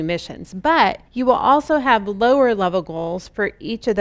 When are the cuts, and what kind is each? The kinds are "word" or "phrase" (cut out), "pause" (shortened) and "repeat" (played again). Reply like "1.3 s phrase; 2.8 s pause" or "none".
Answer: 1.1 s pause